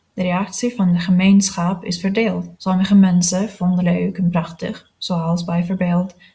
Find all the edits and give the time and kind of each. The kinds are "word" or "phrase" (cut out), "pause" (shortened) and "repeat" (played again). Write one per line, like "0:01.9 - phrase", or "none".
0:02.5 - pause
0:03.8 - word